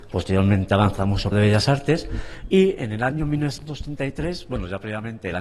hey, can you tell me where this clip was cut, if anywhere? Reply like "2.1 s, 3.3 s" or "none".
1.3 s